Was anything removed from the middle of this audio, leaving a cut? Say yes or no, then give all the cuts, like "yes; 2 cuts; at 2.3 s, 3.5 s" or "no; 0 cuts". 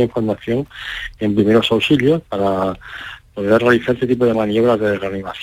no; 0 cuts